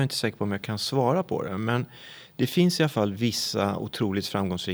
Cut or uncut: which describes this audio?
uncut